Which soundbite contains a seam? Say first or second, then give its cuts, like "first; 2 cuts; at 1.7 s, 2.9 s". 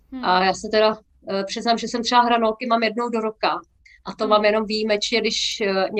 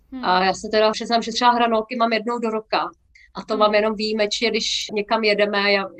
second; 3 cuts; at 0.9 s, 1.3 s, 4.9 s